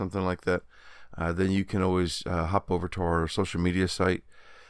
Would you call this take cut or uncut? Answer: uncut